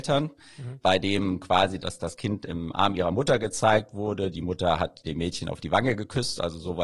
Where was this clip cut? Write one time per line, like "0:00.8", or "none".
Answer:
0:01.8
0:05.0